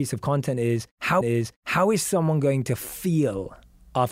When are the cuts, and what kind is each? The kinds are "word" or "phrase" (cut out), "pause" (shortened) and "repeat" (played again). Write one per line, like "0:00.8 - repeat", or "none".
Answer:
0:01.2 - repeat